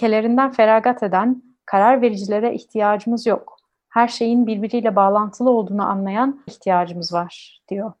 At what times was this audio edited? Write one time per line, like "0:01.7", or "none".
0:06.5